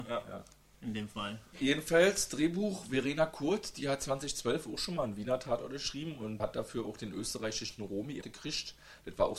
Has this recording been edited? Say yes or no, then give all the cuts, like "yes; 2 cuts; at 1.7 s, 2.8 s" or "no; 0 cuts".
yes; 2 cuts; at 6.4 s, 8.2 s